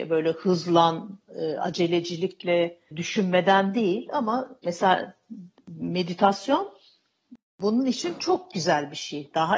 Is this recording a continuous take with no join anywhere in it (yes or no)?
no